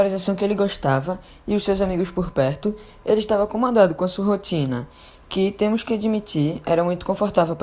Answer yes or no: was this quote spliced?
no